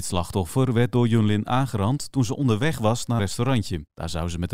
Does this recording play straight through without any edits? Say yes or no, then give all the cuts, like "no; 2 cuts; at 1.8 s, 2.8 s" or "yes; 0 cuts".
no; 1 cut; at 3.2 s